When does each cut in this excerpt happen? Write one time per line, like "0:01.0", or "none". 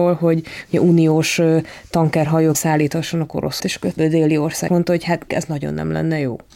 0:02.5
0:03.6
0:04.0
0:04.7
0:05.3

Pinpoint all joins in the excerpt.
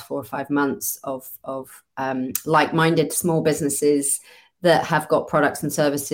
none

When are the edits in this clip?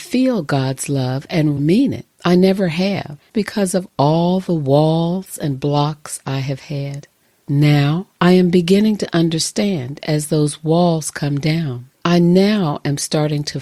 0:01.6
0:02.1
0:03.3
0:08.1
0:11.9

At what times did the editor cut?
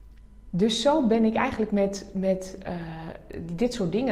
none

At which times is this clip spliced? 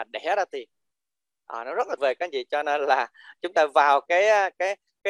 0:02.0

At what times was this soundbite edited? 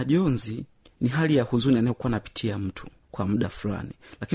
none

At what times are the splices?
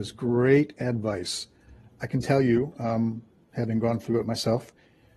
none

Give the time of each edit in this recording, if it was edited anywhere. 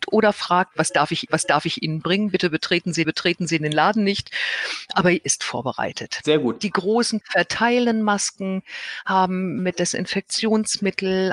0:01.3
0:03.0
0:05.2
0:07.2
0:09.6

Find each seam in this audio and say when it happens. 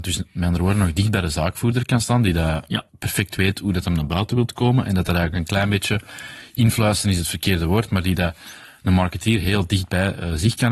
0:02.9

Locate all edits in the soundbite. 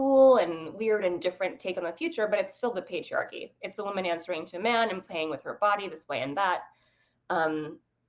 none

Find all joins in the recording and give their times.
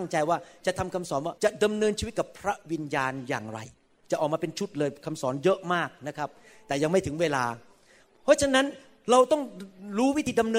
0:01.4

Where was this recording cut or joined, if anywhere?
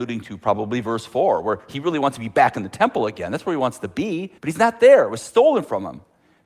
0:04.4

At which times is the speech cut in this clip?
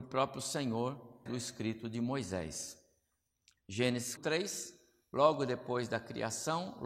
0:01.3
0:04.2

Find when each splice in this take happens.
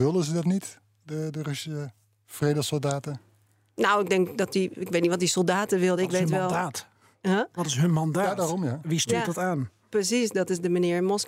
none

